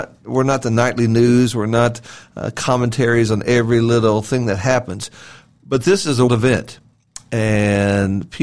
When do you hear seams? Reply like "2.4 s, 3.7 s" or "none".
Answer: 6.3 s